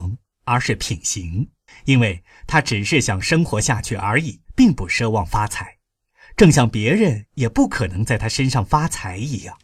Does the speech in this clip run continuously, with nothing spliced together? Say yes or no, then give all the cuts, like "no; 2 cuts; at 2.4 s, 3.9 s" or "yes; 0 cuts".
no; 2 cuts; at 1.7 s, 4.4 s